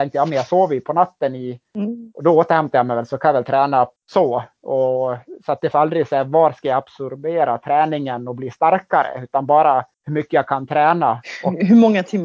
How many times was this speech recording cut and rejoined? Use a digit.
3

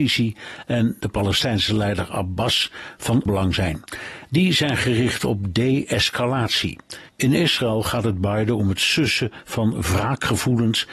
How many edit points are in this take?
1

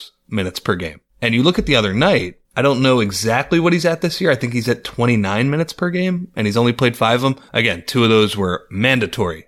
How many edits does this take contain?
3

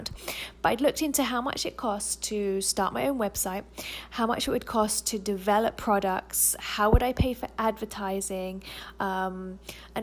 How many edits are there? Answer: 0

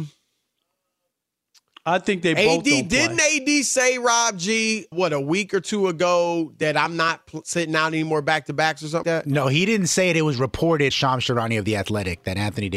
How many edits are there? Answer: 3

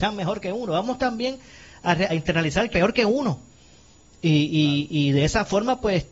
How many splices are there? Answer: 2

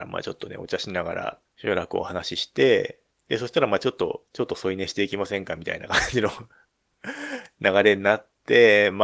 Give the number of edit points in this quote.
3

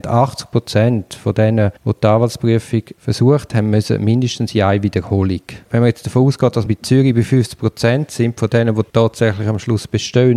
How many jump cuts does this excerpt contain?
5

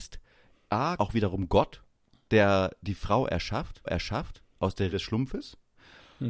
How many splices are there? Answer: 4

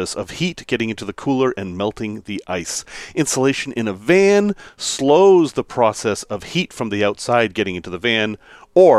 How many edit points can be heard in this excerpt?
0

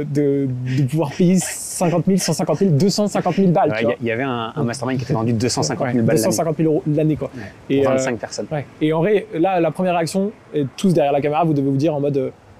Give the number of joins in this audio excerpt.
1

